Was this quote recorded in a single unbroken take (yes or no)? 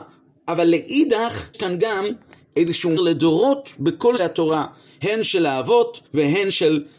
no